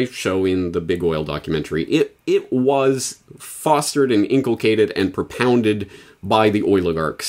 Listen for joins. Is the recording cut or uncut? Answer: uncut